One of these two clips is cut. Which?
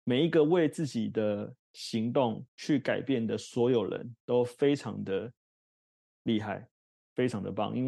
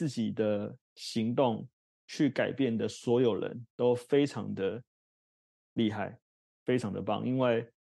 first; 1 cut; at 2.5 s

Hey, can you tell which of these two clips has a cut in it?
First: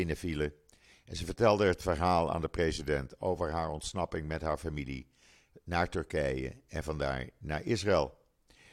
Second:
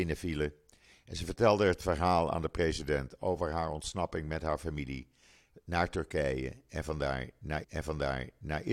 second; 1 cut; at 7.6 s

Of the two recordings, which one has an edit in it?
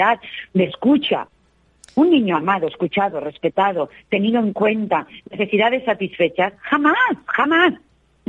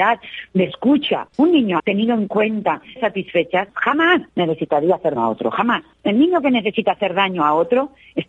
second; 7 cuts; at 1.3 s, 1.8 s, 3.0 s, 3.7 s, 4.3 s, 5.2 s, 5.9 s

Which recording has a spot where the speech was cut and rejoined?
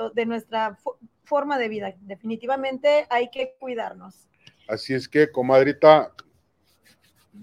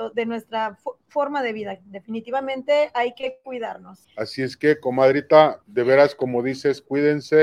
second; 3 cuts; at 1.0 s, 4.0 s, 5.6 s

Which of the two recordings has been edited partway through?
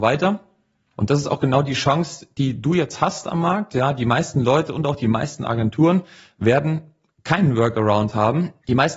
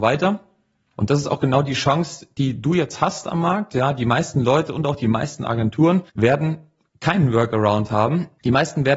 second; 1 cut; at 6.1 s

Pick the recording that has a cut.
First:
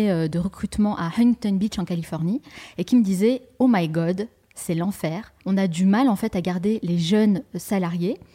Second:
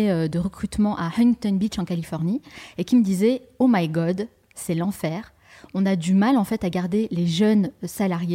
first; 1 cut; at 5.4 s

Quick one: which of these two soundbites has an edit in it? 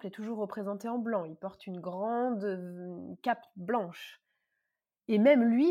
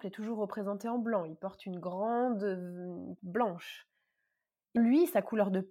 second; 2 cuts; at 3.2 s, 4.8 s

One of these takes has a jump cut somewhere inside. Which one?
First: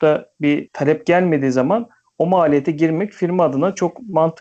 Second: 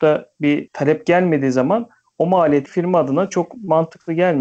second; 1 cut; at 2.7 s

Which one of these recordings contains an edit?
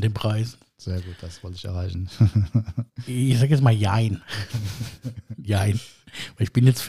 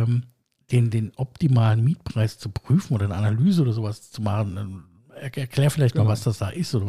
first; 1 cut; at 2.9 s

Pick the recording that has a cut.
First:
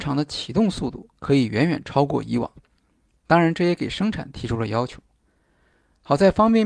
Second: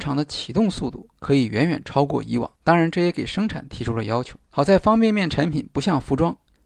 second; 2 cuts; at 2.6 s, 4.4 s

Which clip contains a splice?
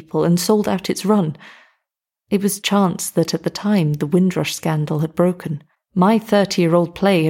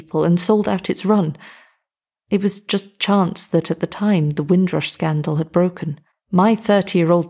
first; 1 cut; at 2.6 s

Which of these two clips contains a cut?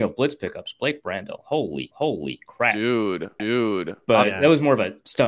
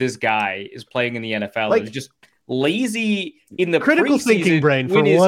first; 2 cuts; at 1.9 s, 3.4 s

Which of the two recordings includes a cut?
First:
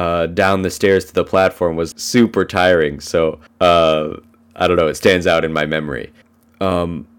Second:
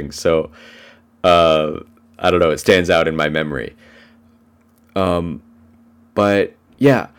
first; 3 cuts; at 1.9 s, 3.5 s, 6.2 s

